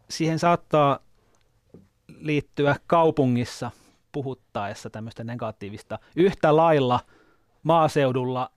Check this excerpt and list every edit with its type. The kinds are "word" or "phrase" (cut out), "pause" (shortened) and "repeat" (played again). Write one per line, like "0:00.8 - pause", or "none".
none